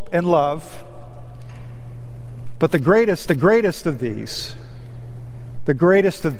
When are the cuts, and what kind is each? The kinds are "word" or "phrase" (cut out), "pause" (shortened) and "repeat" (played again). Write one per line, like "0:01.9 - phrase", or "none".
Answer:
0:03.3 - repeat